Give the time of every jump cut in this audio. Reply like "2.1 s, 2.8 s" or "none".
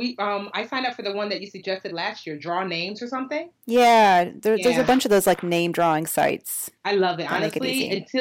3.6 s, 6.8 s